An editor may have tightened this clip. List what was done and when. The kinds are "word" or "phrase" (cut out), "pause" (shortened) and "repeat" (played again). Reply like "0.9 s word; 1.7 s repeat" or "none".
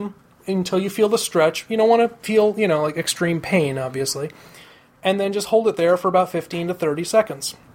none